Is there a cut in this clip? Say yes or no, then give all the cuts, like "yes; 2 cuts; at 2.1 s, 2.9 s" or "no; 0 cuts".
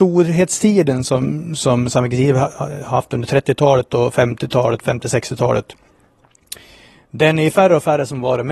no; 0 cuts